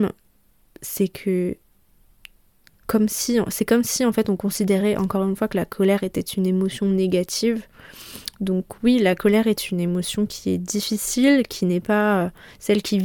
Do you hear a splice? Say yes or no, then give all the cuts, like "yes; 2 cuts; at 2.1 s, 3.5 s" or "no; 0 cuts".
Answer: no; 0 cuts